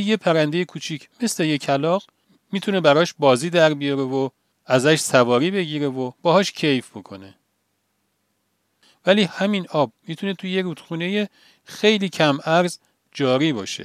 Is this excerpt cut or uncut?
uncut